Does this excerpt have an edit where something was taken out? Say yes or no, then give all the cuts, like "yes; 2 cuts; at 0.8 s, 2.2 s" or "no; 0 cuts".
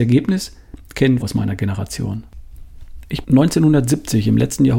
yes; 2 cuts; at 1.2 s, 3.2 s